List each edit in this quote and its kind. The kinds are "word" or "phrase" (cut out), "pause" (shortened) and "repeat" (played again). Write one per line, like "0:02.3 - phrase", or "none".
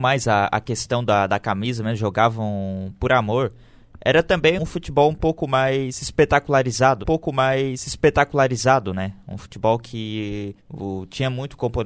0:04.6 - word
0:07.0 - repeat
0:10.6 - pause